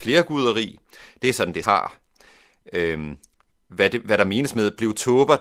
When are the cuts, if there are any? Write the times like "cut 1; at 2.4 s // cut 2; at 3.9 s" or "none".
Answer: cut 1; at 1.6 s

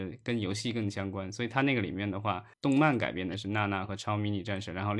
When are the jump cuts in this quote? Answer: cut 1; at 2.5 s

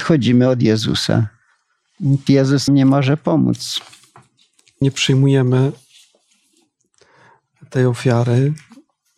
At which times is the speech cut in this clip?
cut 1; at 2.3 s // cut 2; at 2.7 s // cut 3; at 4.8 s

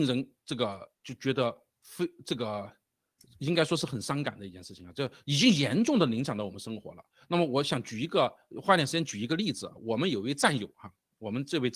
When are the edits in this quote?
cut 1; at 1.0 s // cut 2; at 3.2 s

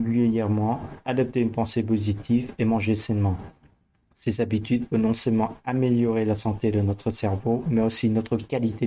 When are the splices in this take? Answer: none

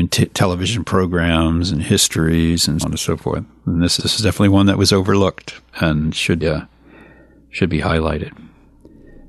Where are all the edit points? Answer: cut 1; at 2.8 s // cut 2; at 4.0 s // cut 3; at 6.4 s

